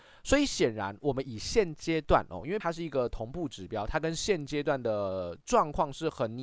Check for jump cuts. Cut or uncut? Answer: cut